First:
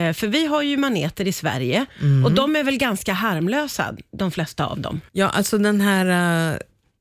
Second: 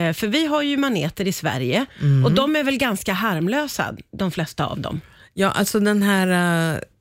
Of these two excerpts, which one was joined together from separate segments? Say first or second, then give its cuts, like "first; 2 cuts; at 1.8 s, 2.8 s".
first; 1 cut; at 5.1 s